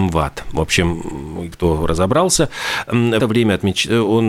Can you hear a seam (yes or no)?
yes